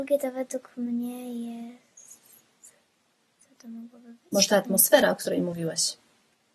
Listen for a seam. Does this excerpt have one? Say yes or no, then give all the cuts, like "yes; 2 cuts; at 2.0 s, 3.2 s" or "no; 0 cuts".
no; 0 cuts